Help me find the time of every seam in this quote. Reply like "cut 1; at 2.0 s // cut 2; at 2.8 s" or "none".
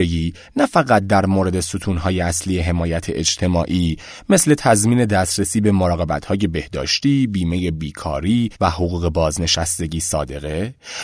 cut 1; at 8.5 s